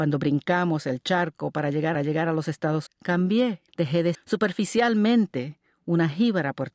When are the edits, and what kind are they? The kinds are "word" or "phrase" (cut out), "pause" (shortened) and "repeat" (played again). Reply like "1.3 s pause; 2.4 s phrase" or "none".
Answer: 1.9 s repeat; 2.9 s word; 3.7 s pause; 4.1 s word